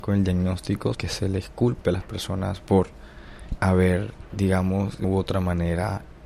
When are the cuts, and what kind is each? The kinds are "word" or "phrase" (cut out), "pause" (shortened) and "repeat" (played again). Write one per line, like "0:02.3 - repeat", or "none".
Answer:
0:00.9 - word
0:02.6 - word
0:03.6 - word
0:05.0 - word